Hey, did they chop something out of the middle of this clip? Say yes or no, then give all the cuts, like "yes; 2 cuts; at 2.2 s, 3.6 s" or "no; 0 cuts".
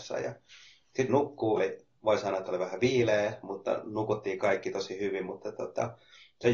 yes; 2 cuts; at 1.1 s, 1.6 s